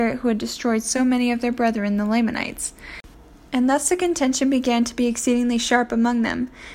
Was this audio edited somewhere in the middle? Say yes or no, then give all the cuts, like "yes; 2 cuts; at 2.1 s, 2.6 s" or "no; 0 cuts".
no; 0 cuts